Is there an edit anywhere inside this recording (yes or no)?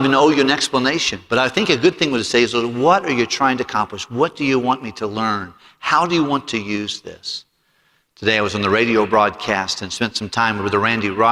no